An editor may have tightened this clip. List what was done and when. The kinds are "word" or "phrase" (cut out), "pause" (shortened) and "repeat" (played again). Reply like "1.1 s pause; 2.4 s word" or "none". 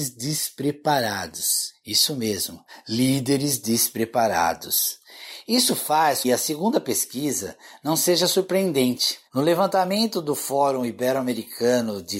6.2 s phrase; 9.3 s pause